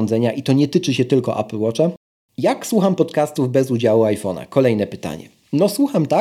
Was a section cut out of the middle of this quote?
no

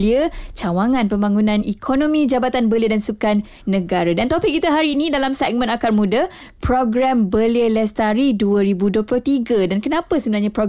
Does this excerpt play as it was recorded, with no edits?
yes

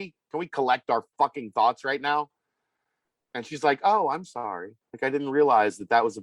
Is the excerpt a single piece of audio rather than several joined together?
yes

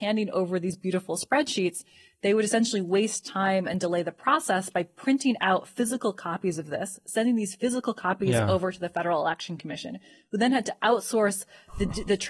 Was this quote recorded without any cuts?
yes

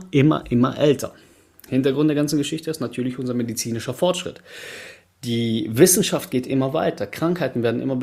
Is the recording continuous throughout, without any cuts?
yes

